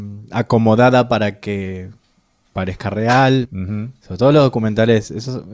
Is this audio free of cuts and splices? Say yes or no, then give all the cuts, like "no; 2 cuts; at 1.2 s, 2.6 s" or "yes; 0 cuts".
yes; 0 cuts